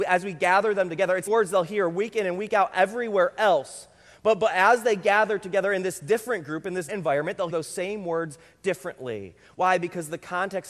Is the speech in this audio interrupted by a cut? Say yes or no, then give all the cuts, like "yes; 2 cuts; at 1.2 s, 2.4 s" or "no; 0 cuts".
yes; 3 cuts; at 1.3 s, 6.9 s, 7.5 s